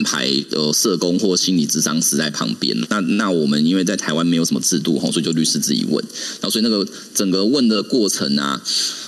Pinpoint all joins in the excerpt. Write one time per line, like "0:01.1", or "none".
0:02.9